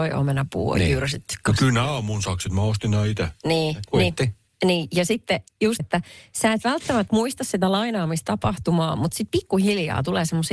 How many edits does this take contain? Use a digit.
1